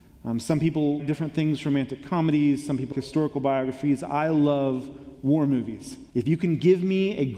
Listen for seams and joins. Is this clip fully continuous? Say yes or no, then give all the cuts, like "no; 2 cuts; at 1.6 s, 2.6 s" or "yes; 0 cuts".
no; 3 cuts; at 1.0 s, 2.9 s, 6.1 s